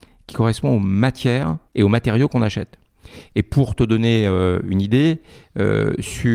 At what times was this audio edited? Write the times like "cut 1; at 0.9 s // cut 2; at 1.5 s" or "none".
cut 1; at 1.7 s